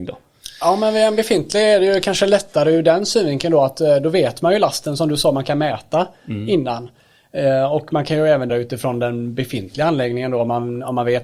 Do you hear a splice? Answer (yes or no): yes